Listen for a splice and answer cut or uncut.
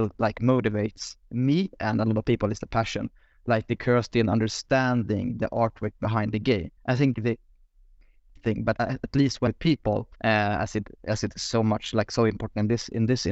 cut